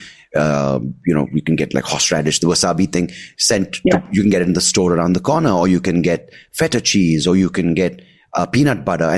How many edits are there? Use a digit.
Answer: 0